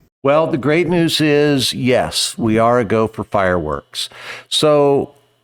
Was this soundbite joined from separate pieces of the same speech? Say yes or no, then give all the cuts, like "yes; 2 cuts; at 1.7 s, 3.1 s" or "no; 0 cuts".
no; 0 cuts